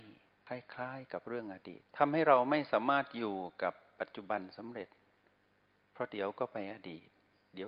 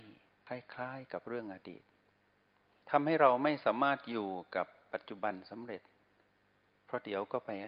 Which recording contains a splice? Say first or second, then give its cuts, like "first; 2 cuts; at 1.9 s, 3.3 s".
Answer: first; 1 cut; at 1.9 s